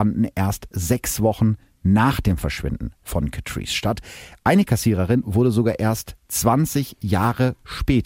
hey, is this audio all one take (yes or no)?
yes